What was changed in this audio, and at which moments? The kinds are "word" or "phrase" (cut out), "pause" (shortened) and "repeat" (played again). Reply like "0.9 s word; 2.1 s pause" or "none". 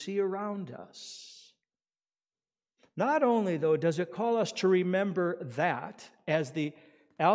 none